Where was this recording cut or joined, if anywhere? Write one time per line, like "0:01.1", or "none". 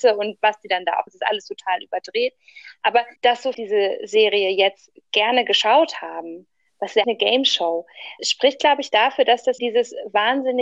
0:01.1
0:03.2
0:03.5
0:07.0
0:08.2
0:09.6